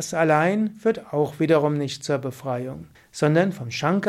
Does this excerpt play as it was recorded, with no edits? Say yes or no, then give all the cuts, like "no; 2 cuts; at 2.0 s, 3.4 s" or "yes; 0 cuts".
no; 1 cut; at 2.9 s